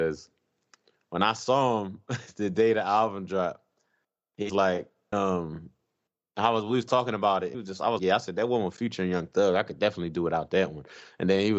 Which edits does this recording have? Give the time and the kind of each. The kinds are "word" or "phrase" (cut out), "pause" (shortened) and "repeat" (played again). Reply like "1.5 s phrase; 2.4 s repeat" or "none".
4.5 s word; 5.1 s word; 7.5 s word; 8.0 s word